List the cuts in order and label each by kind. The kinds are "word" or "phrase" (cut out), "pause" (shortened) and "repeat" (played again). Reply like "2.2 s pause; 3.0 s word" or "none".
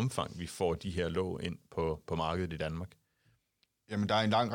none